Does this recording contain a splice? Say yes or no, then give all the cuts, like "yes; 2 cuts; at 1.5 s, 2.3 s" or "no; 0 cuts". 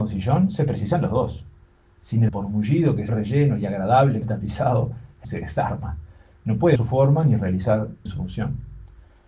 yes; 6 cuts; at 2.3 s, 3.1 s, 4.2 s, 5.2 s, 6.8 s, 8.1 s